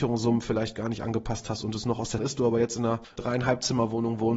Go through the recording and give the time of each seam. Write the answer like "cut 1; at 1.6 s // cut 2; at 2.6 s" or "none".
cut 1; at 2.2 s